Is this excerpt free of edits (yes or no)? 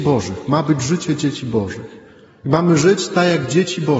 yes